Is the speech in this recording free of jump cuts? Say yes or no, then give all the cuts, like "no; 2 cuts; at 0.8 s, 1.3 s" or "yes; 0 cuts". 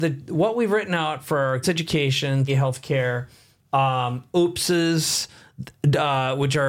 no; 2 cuts; at 1.6 s, 2.5 s